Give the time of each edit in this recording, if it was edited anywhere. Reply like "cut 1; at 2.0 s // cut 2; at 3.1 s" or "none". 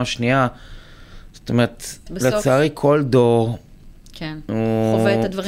cut 1; at 2.1 s